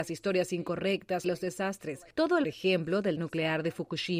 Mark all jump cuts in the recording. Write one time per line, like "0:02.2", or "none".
0:01.2
0:02.1
0:02.4
0:03.2